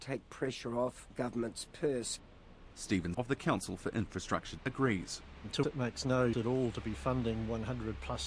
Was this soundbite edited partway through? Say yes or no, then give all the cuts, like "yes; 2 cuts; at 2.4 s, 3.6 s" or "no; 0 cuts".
yes; 5 cuts; at 1.1 s, 3.1 s, 4.6 s, 5.6 s, 6.3 s